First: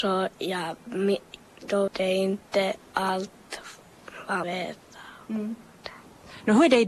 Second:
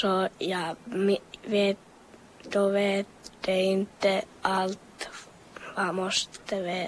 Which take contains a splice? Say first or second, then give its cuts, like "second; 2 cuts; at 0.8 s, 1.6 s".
first; 3 cuts; at 1.4 s, 1.9 s, 4.4 s